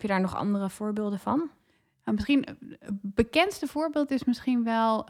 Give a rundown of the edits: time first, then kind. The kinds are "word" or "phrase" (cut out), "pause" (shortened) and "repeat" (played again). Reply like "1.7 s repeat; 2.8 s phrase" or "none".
none